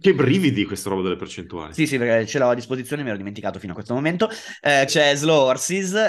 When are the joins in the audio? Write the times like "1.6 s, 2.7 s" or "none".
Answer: 4.9 s